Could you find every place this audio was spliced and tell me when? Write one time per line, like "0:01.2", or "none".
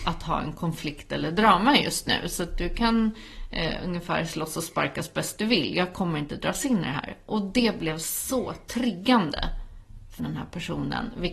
0:10.2